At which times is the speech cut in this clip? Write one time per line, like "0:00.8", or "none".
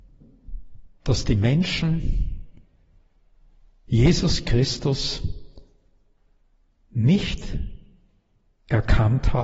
none